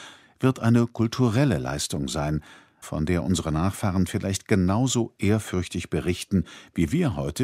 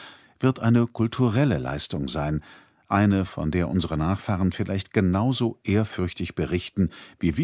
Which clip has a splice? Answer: first; 1 cut; at 2.8 s

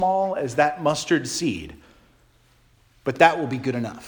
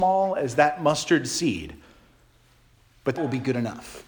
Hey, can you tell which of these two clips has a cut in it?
second; 1 cut; at 3.2 s

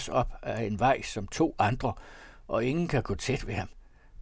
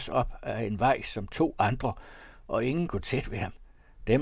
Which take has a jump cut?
second; 1 cut; at 2.9 s

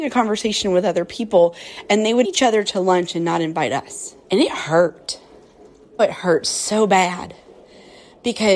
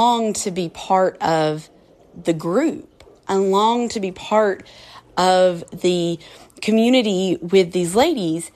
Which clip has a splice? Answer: first; 3 cuts; at 2.2 s, 4.2 s, 6.0 s

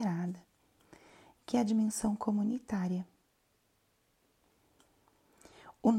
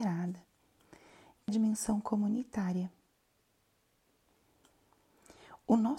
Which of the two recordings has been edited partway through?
second; 1 cut; at 1.5 s

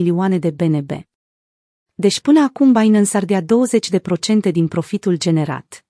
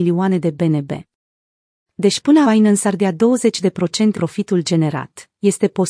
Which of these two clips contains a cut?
second; 2 cuts; at 2.4 s, 4.1 s

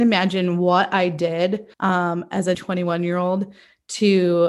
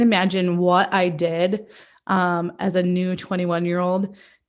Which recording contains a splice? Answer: first; 2 cuts; at 1.7 s, 2.5 s

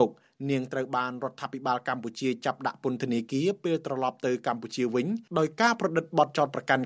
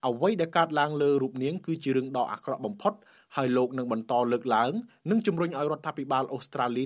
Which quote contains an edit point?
first; 1 cut; at 5.3 s

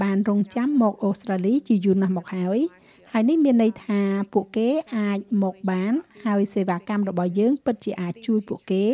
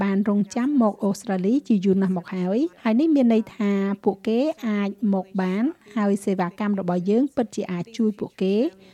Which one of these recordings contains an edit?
second; 1 cut; at 2.7 s

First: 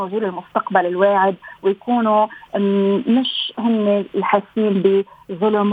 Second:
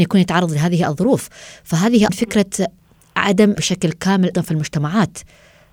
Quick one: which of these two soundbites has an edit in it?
second; 3 cuts; at 2.1 s, 3.6 s, 4.3 s

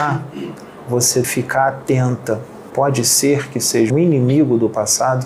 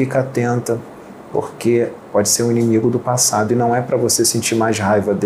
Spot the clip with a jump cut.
first; 3 cuts; at 1.2 s, 2.7 s, 3.9 s

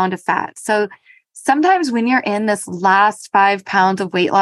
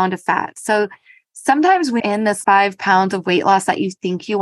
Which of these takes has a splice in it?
second; 2 cuts; at 2.0 s, 2.4 s

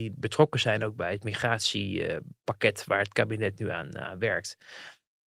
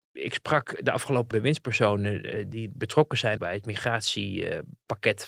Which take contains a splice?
second; 3 cuts; at 1.3 s, 2.5 s, 3.4 s

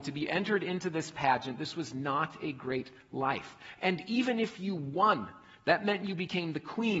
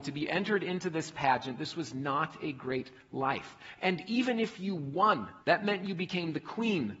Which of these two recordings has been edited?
second; 1 cut; at 5.4 s

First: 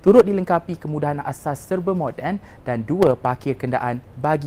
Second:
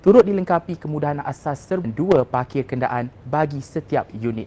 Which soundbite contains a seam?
second; 1 cut; at 1.8 s

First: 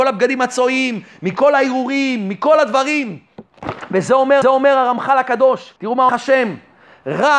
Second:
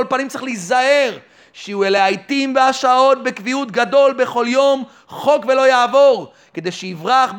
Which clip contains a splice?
first; 3 cuts; at 4.4 s, 5.8 s, 6.1 s

